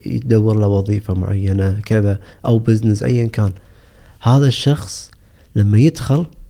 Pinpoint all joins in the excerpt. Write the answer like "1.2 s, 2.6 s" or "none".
none